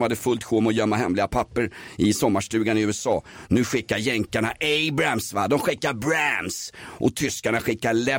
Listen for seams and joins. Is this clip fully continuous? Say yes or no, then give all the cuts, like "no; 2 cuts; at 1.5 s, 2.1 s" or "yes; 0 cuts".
yes; 0 cuts